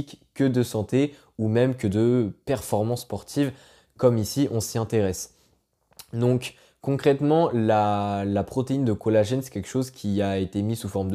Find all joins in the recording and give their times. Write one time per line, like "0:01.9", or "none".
none